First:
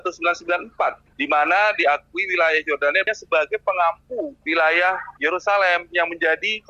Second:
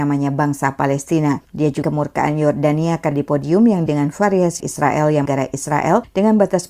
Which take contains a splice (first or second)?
second